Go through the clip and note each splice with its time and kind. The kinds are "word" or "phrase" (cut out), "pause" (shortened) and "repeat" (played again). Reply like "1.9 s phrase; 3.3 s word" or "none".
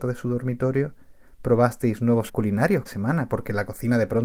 2.3 s word; 2.9 s word

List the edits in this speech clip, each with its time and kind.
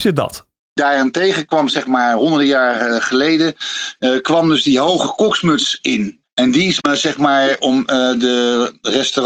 6.8 s word

